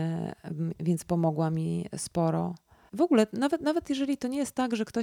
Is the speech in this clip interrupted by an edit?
no; 0 cuts

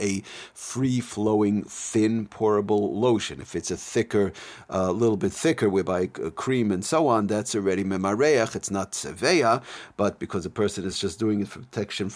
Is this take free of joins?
yes; 0 cuts

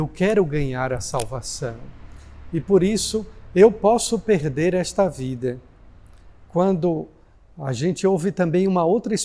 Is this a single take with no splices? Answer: yes; 0 cuts

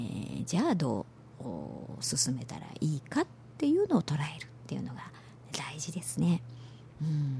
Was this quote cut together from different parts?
no; 0 cuts

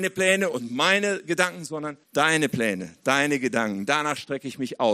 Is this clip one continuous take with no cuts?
no; 1 cut; at 2.0 s

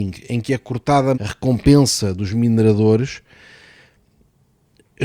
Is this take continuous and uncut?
no; 1 cut; at 1.1 s

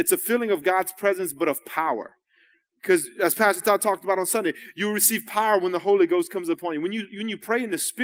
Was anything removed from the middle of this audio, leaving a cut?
no; 0 cuts

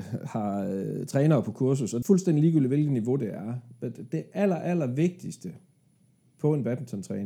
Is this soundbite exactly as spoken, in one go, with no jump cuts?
no; 1 cut; at 2.0 s

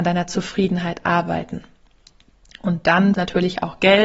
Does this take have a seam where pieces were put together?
yes; 1 cut; at 3.2 s

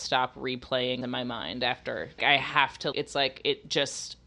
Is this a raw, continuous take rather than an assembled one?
no; 3 cuts; at 1.0 s, 2.2 s, 2.9 s

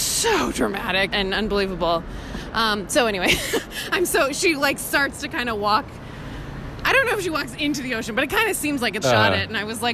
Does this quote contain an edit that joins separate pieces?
yes; 2 cuts; at 1.1 s, 9.0 s

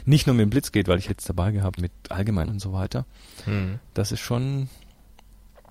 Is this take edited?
yes; 3 cuts; at 1.1 s, 1.8 s, 2.5 s

